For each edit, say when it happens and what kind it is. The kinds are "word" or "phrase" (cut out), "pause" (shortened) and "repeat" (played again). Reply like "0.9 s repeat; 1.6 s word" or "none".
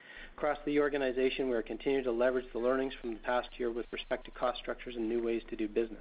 none